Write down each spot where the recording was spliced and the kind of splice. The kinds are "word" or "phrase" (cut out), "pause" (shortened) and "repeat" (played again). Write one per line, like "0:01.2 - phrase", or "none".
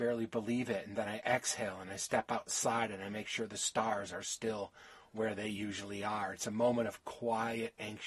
none